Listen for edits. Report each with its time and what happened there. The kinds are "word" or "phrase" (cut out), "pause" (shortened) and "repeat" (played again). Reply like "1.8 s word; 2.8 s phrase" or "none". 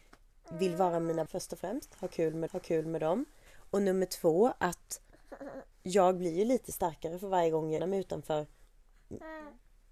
1.3 s word; 2.5 s repeat; 5.7 s pause; 7.8 s word

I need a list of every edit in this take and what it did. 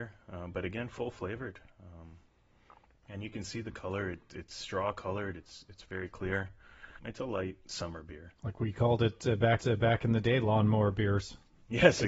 2.9 s pause; 8.4 s pause; 9.6 s repeat

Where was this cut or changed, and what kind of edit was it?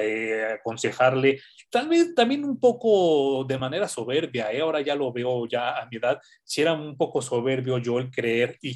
none

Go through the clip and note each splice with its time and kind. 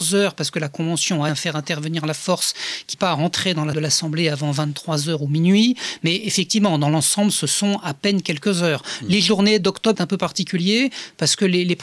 1.3 s word; 2.9 s word; 3.7 s word; 9.9 s word

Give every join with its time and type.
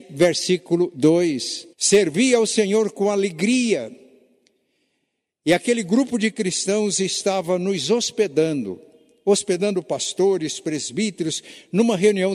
1.7 s pause

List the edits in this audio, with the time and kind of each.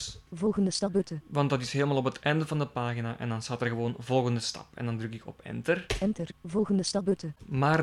none

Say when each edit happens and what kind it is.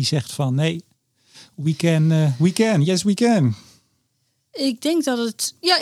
none

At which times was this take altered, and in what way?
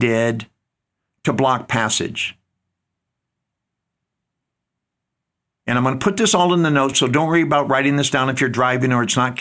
none

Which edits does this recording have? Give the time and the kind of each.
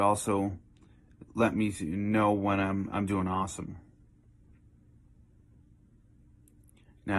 1.3 s pause

